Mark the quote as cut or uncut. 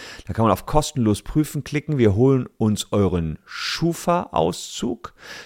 uncut